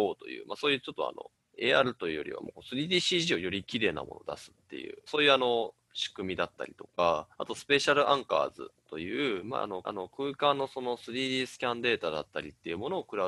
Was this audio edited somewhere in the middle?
yes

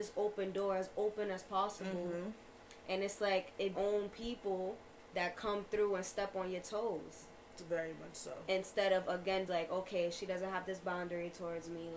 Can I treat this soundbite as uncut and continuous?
no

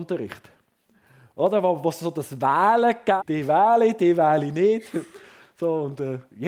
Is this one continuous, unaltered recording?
no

